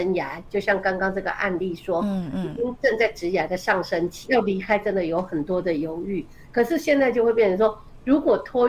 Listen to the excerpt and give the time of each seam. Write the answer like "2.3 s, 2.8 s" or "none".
4.2 s